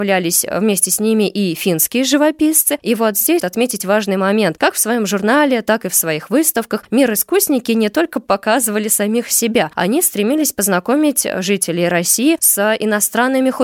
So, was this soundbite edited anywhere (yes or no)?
yes